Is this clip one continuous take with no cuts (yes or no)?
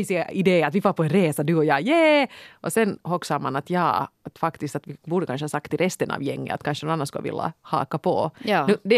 no